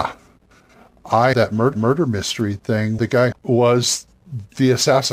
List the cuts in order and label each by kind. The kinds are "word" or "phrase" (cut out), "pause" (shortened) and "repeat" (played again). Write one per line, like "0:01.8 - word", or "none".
0:01.3 - word
0:01.7 - repeat
0:03.0 - word
0:03.3 - phrase